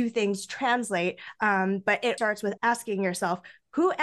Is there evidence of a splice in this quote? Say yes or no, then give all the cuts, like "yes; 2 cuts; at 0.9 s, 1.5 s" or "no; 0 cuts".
yes; 2 cuts; at 2.2 s, 2.6 s